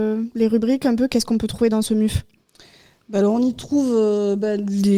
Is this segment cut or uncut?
uncut